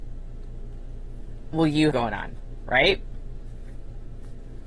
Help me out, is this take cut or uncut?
cut